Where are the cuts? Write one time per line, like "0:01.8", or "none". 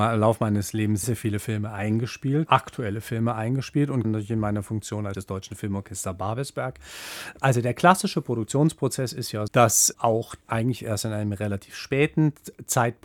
0:01.0
0:02.5
0:04.0
0:05.1
0:09.5
0:10.4